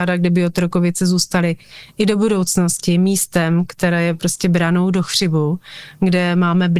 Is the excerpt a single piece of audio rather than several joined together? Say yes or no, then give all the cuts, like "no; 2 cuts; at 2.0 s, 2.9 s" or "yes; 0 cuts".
yes; 0 cuts